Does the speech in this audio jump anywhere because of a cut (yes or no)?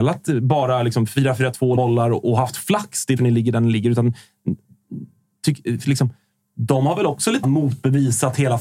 yes